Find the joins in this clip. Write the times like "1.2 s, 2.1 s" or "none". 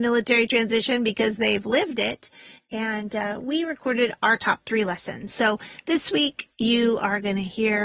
none